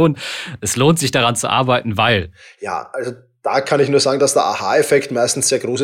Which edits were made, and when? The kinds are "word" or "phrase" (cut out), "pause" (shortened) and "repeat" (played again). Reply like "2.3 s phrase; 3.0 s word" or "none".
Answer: none